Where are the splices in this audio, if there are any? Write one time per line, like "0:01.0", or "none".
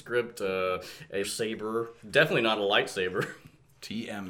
0:01.2